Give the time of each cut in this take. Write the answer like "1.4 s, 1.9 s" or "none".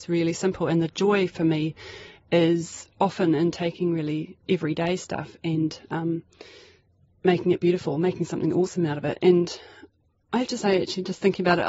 none